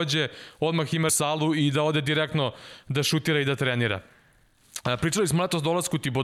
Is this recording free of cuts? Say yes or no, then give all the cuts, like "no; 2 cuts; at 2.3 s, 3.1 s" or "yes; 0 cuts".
no; 1 cut; at 1.1 s